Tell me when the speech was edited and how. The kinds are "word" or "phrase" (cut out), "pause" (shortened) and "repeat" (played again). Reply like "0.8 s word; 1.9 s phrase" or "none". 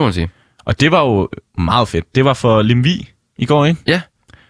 1.5 s pause